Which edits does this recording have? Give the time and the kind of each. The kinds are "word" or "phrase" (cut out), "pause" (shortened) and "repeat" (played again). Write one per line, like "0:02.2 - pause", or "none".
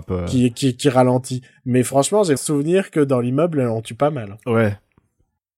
0:02.4 - word